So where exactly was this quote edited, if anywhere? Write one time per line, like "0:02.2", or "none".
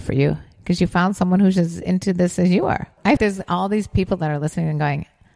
0:03.2